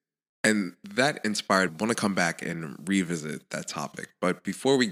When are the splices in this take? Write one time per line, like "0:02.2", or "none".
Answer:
0:01.7